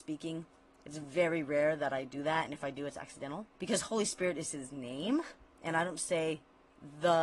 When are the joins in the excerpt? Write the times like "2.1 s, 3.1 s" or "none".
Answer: 3.5 s